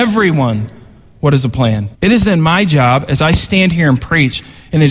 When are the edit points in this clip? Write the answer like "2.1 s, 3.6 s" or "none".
1.9 s